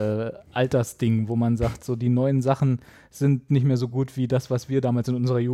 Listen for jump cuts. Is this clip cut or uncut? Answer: uncut